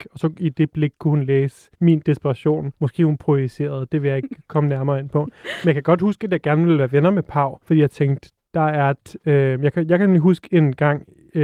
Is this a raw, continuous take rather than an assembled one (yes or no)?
no